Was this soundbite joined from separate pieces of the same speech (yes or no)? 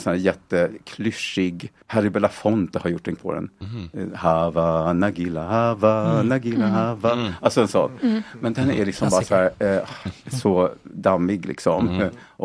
yes